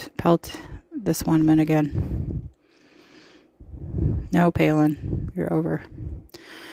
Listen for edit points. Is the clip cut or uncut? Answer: uncut